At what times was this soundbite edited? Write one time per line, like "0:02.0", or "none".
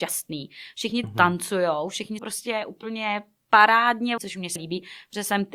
0:01.0
0:02.2
0:04.2
0:04.6